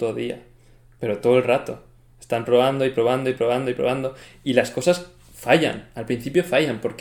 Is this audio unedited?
yes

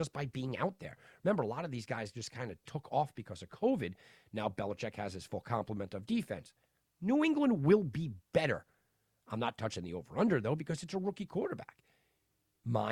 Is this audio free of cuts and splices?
yes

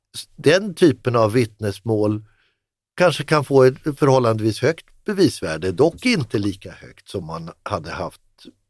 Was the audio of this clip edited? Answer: yes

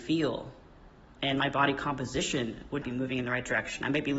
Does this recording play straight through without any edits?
no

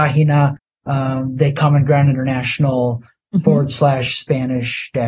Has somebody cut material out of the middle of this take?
no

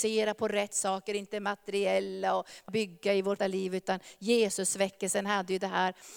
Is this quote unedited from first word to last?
no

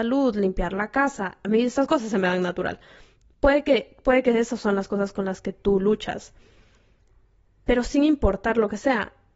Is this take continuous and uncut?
yes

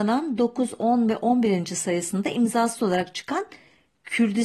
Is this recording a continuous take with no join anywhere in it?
yes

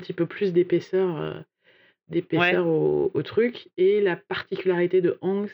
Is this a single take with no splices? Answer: yes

